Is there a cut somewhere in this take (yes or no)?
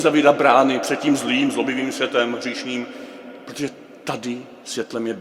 no